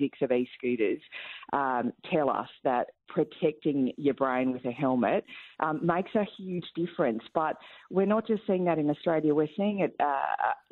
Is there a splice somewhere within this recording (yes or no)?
no